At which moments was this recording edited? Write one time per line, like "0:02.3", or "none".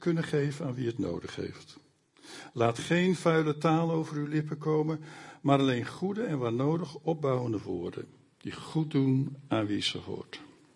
none